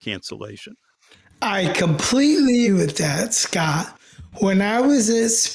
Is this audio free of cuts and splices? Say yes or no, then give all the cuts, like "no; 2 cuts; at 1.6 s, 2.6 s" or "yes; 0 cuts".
no; 1 cut; at 2.6 s